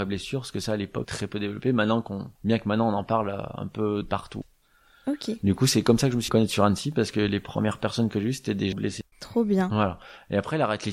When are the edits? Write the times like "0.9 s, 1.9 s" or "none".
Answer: 1.0 s, 2.4 s, 4.0 s, 6.3 s, 8.7 s, 9.1 s

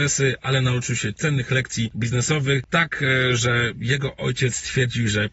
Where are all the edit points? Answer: none

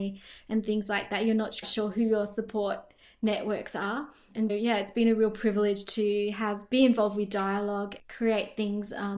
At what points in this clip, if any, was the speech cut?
1.6 s, 4.5 s, 8.0 s

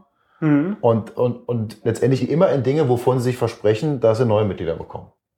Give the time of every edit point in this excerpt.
2.2 s

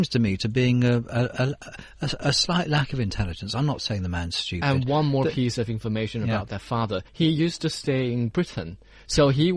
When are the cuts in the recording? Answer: 7.1 s

